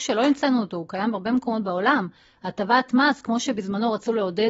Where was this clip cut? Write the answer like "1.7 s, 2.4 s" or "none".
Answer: none